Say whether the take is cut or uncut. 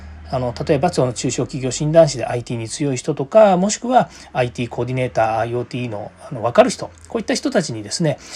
uncut